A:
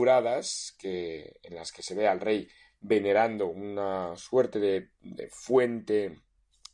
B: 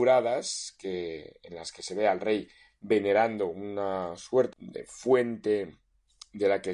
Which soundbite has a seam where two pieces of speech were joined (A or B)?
B